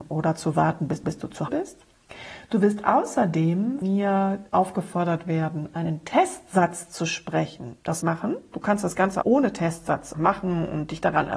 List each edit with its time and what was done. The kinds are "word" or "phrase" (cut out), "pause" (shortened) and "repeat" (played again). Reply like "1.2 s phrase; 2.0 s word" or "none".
1.0 s repeat; 1.5 s word; 3.8 s word; 4.5 s pause; 8.0 s phrase; 9.2 s word; 10.1 s word